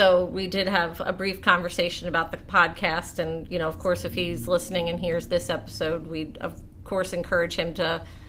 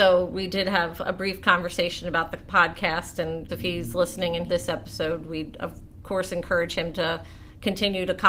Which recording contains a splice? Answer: second; 2 cuts; at 3.5 s, 4.5 s

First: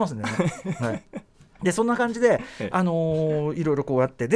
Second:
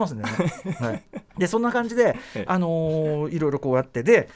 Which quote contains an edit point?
second; 1 cut; at 1.3 s

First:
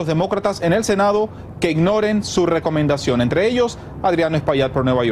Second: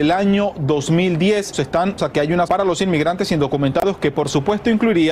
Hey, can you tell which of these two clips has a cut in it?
second; 3 cuts; at 1.5 s, 2.0 s, 2.5 s

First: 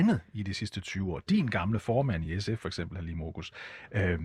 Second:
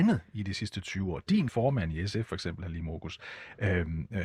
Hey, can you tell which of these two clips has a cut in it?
second; 1 cut; at 1.5 s

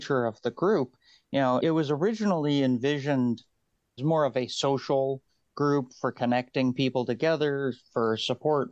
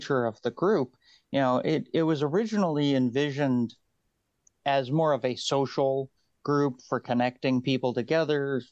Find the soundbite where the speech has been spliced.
first; 2 cuts; at 1.6 s, 4.0 s

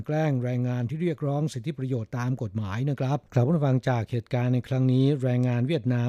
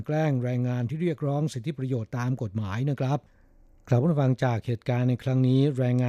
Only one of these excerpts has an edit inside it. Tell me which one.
first; 1 cut; at 3.3 s

